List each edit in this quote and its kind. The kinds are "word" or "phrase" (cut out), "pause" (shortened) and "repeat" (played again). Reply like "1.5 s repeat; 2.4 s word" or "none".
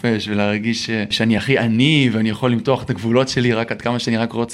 none